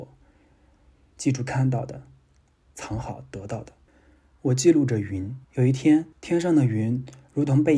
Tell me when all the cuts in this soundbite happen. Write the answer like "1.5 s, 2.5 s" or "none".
5.4 s, 6.1 s